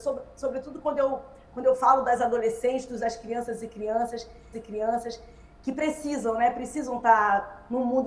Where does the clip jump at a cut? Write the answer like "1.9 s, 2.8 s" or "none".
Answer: 3.0 s, 4.5 s